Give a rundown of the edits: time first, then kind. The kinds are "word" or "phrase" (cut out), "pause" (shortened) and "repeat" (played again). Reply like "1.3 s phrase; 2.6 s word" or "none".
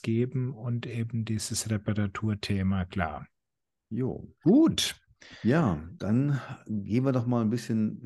4.4 s pause